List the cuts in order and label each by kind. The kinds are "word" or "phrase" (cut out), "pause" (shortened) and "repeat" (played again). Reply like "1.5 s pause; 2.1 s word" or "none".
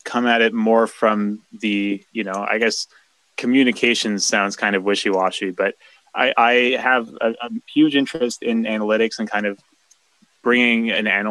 none